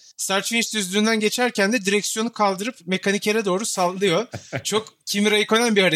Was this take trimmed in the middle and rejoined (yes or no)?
no